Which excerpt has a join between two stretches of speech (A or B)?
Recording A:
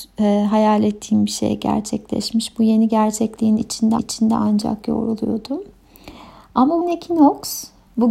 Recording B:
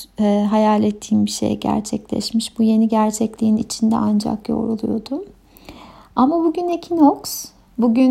A